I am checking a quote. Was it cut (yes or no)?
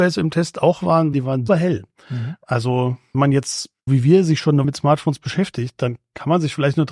yes